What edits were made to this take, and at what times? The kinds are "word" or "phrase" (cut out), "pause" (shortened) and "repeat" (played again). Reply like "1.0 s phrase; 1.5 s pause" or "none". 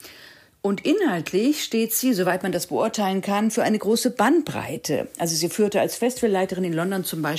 none